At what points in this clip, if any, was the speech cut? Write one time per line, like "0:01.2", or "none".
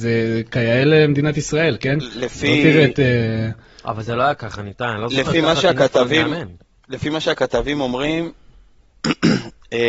none